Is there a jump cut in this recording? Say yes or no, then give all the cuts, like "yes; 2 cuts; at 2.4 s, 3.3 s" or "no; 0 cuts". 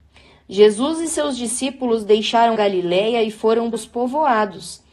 yes; 2 cuts; at 2.5 s, 3.7 s